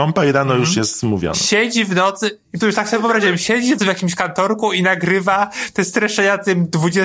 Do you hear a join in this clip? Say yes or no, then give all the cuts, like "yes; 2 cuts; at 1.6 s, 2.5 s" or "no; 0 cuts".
yes; 2 cuts; at 2.6 s, 3.8 s